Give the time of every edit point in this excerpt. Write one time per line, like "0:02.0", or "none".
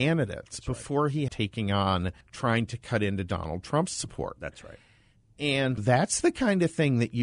0:01.3
0:02.2
0:05.8